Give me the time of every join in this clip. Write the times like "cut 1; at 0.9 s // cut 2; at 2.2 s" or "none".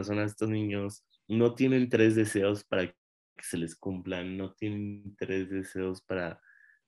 none